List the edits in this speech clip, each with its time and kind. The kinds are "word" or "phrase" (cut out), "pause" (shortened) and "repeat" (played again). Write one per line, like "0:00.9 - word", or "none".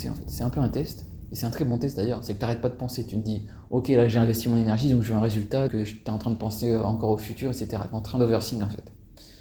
0:05.7 - word